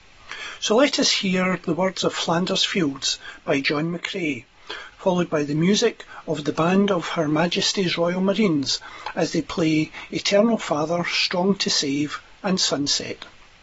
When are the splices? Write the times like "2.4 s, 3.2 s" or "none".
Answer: none